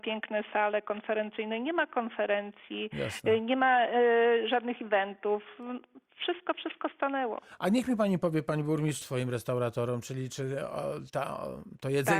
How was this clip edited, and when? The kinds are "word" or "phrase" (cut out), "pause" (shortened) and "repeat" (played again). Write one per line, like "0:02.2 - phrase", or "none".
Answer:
0:09.0 - phrase